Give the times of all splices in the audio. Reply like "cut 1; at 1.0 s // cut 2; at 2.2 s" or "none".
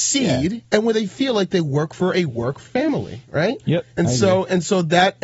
none

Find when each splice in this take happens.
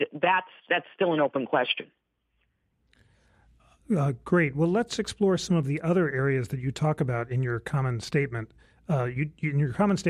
none

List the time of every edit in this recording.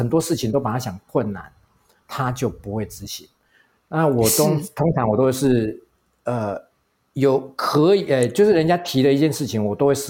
none

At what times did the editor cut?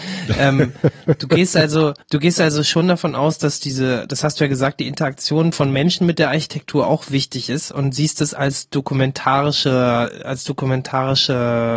cut 1; at 2.0 s

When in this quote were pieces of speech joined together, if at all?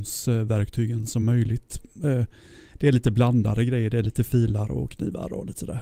none

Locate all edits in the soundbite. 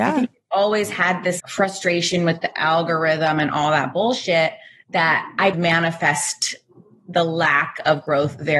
cut 1; at 1.4 s // cut 2; at 5.5 s

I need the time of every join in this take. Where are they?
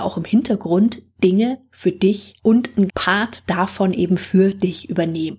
cut 1; at 2.4 s // cut 2; at 2.9 s

